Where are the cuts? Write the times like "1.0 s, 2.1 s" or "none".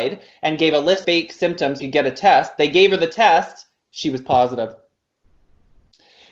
1.0 s, 1.8 s